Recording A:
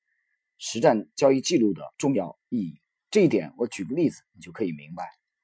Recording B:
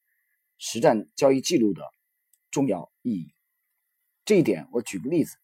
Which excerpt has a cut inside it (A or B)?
A